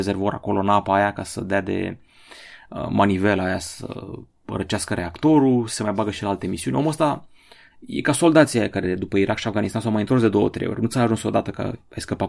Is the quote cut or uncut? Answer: uncut